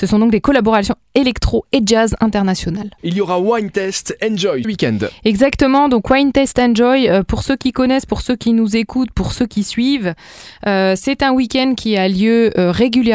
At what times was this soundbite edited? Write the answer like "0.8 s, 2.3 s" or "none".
4.6 s